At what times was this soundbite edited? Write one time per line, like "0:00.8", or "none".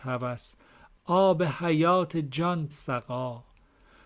0:02.7